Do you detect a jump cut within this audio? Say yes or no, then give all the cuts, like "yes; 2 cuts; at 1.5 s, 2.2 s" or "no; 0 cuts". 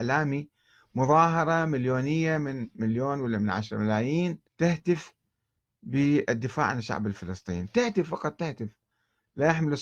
yes; 1 cut; at 4.5 s